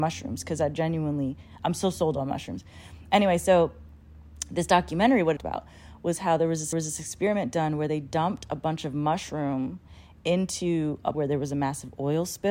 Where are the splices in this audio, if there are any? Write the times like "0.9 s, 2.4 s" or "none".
5.4 s, 6.7 s, 11.1 s